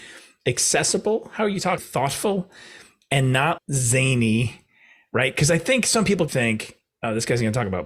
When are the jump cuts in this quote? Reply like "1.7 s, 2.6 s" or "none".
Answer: 1.8 s, 3.6 s, 6.3 s